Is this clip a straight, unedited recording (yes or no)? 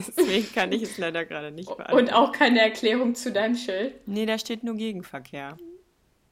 yes